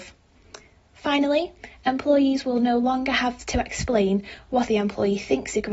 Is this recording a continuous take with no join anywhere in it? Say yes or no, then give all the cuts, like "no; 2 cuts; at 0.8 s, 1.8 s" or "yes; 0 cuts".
no; 1 cut; at 4.7 s